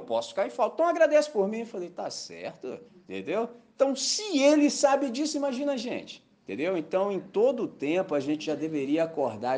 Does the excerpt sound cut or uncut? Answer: cut